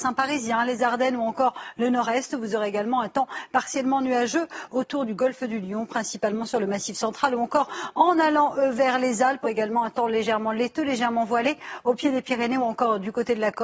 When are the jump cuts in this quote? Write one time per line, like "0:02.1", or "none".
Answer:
0:09.4